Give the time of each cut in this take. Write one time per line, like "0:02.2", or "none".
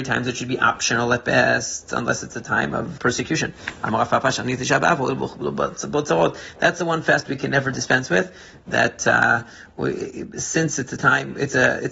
0:03.0